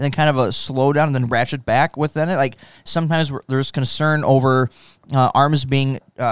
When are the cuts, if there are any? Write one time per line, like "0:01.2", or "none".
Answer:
none